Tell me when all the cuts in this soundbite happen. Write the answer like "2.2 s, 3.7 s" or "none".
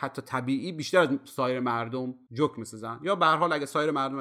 none